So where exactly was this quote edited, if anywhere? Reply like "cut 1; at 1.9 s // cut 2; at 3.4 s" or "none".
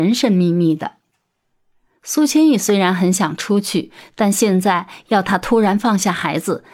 none